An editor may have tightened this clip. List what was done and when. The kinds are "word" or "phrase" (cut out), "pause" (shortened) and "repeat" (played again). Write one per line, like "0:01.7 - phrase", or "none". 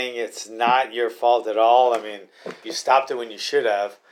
0:02.6 - word